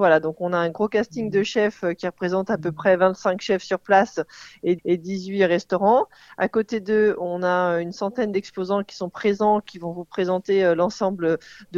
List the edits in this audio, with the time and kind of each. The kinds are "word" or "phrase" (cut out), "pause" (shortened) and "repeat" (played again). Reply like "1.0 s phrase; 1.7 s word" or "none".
4.8 s repeat